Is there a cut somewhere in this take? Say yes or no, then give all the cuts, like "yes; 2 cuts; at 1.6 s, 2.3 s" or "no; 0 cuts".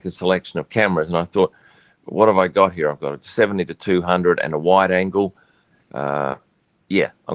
no; 0 cuts